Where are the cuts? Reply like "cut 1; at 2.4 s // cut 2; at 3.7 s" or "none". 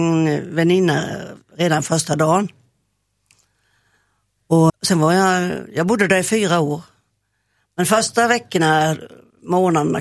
cut 1; at 4.7 s

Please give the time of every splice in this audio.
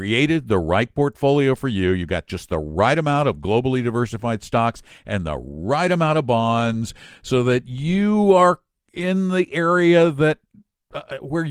none

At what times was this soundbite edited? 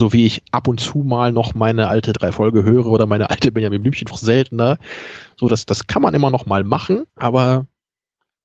cut 1; at 2.3 s // cut 2; at 4.1 s // cut 3; at 7.1 s

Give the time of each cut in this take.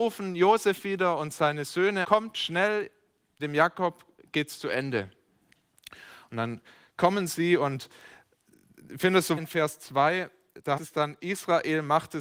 cut 1; at 2.0 s // cut 2; at 3.4 s // cut 3; at 9.4 s // cut 4; at 10.8 s

